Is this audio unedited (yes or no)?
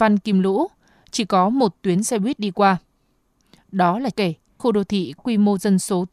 no